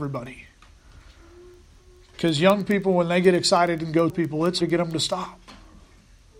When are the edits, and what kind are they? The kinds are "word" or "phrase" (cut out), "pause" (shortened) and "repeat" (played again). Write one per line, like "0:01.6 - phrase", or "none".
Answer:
0:04.1 - word
0:04.6 - word